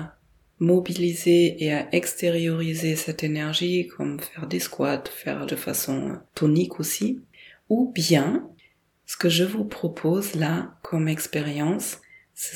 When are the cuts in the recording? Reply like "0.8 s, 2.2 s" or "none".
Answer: 5.5 s, 6.3 s